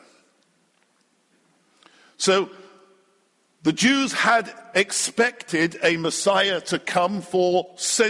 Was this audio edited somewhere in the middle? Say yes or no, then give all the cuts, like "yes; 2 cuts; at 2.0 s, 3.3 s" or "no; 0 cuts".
no; 0 cuts